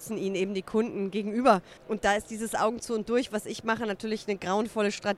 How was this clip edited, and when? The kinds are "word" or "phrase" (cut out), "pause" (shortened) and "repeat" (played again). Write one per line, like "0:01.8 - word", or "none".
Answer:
0:01.8 - pause